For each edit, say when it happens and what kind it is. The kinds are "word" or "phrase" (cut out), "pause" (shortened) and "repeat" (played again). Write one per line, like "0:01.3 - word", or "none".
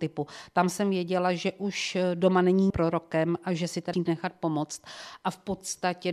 0:02.7 - word
0:03.9 - word